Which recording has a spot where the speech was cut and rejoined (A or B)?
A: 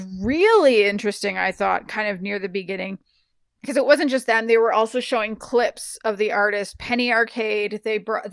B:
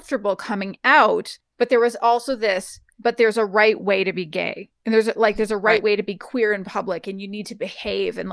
B